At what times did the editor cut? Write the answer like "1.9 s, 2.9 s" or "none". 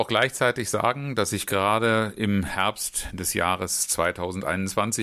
none

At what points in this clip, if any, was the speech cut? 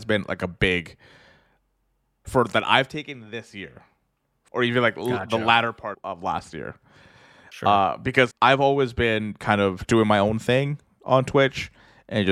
2.2 s, 4.5 s, 5.9 s, 8.3 s, 9.9 s

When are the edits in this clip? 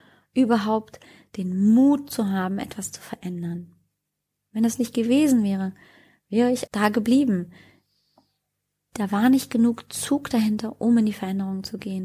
6.7 s

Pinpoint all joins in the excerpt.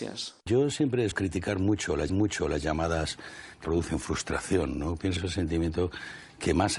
1.1 s, 2.1 s, 3.6 s, 5.2 s

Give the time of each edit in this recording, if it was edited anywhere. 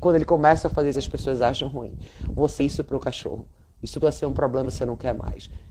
0.9 s, 2.6 s, 4.0 s, 4.6 s

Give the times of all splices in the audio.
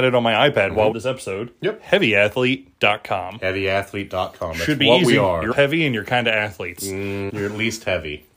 0.9 s, 5.5 s, 7.3 s

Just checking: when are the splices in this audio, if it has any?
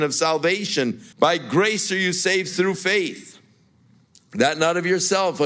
1.1 s

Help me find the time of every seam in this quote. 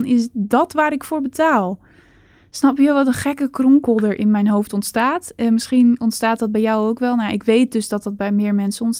none

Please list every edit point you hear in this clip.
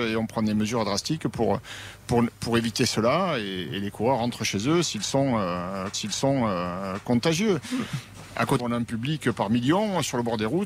5.9 s, 8.6 s

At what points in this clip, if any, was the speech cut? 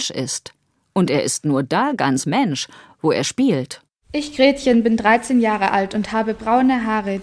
none

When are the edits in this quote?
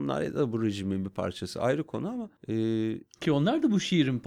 2.4 s

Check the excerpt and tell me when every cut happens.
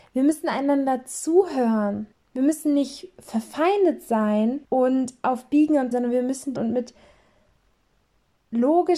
2.1 s, 4.6 s, 5.9 s, 6.6 s

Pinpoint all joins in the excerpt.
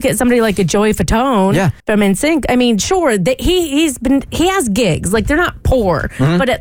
1.8 s

